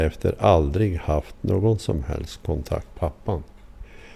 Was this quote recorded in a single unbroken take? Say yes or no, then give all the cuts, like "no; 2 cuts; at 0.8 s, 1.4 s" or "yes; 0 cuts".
no; 1 cut; at 2.9 s